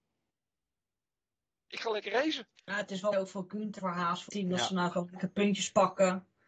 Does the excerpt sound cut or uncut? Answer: cut